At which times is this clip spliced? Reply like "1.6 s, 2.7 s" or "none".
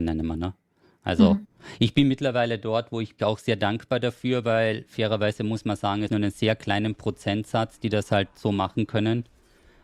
3.2 s, 6.1 s